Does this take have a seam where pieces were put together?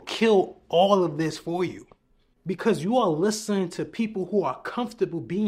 no; 0 cuts

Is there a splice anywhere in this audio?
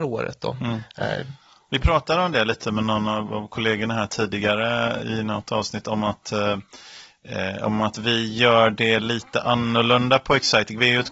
no; 0 cuts

